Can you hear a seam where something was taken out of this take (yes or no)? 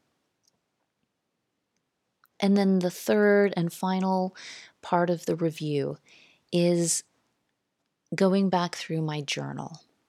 no